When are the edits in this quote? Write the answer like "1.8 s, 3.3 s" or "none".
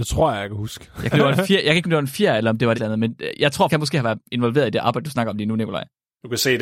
1.1 s, 1.8 s, 2.7 s, 3.7 s